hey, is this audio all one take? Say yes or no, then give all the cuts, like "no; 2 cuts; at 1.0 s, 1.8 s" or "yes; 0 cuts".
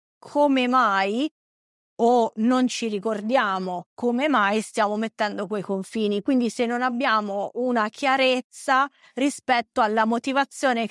yes; 0 cuts